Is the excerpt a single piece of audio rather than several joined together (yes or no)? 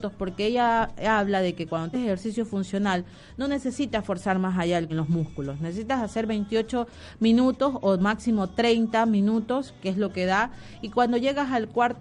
no